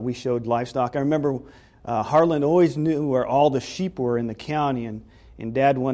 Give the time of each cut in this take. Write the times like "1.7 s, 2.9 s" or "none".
none